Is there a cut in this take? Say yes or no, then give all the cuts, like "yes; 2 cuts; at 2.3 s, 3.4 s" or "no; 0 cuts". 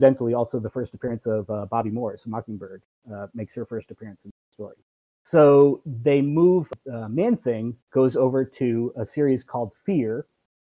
yes; 1 cut; at 7.8 s